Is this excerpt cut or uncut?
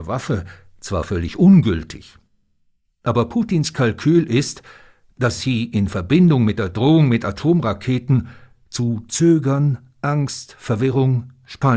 uncut